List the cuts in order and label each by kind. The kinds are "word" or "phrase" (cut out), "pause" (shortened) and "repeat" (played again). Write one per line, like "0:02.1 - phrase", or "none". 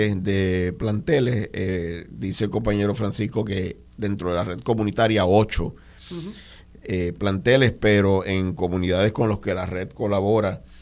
0:03.9 - pause

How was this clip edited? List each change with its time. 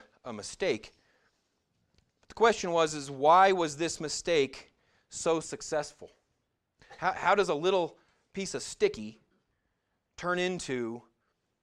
none

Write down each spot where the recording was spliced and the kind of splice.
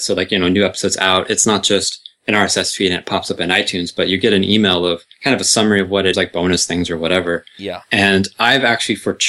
0:05.1 - pause
0:06.1 - phrase

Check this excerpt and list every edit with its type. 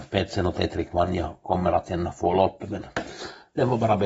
none

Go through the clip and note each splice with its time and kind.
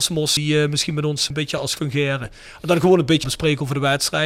0:01.8 - word
0:03.2 - word

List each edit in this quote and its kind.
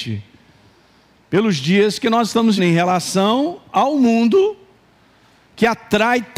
0:02.6 - word

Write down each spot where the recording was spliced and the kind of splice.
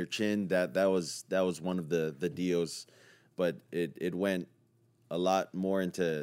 none

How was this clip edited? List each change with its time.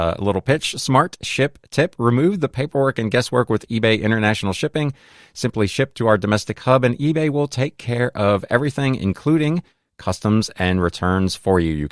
none

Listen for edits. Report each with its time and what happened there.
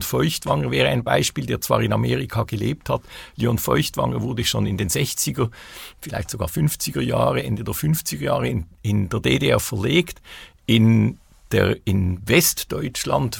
none

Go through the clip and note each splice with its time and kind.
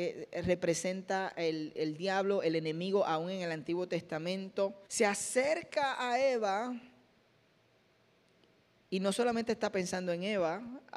0:04.9 - pause

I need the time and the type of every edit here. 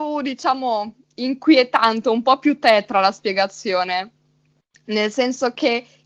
none

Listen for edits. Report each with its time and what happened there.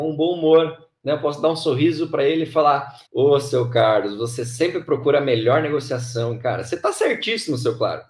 0:03.1 - pause

